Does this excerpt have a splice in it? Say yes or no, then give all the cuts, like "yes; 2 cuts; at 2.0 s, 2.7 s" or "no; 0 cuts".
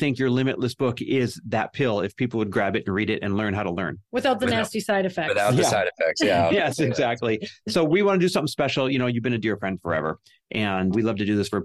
no; 0 cuts